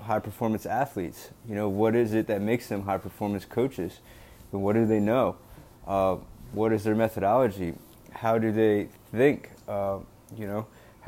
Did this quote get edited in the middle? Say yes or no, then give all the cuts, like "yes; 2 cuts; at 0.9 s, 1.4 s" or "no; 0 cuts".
no; 0 cuts